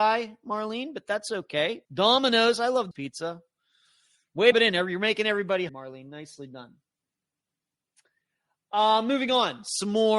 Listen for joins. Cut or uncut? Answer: cut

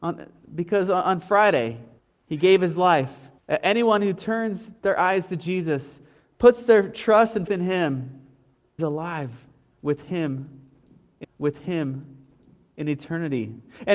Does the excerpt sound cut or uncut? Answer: cut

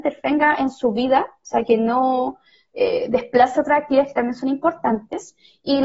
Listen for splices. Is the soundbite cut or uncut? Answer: uncut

